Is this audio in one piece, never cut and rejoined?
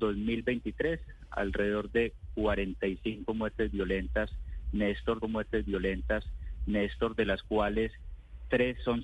no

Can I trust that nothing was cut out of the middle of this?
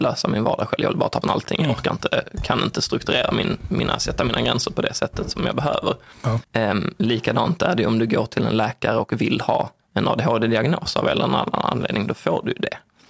no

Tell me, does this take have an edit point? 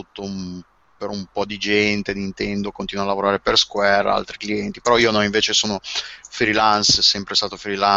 no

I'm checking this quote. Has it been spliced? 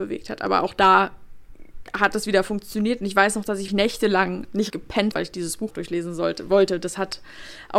yes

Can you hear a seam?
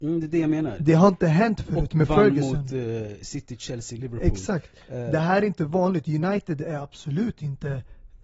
no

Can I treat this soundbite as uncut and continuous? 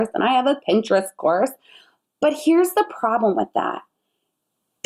yes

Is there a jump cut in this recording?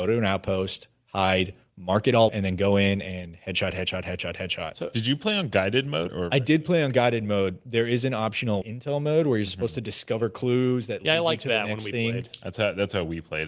yes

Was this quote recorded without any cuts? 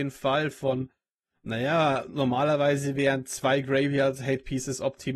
yes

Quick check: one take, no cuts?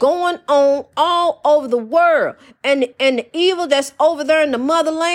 yes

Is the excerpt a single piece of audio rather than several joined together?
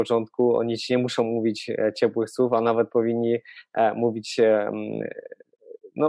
yes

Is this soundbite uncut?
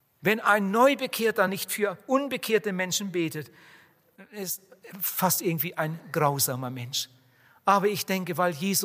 yes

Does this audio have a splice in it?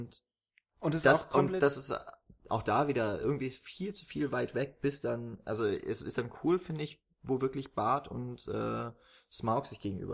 no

